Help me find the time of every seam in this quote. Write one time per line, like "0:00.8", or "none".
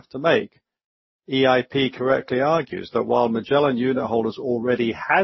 none